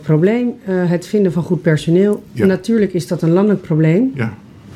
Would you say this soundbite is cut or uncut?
uncut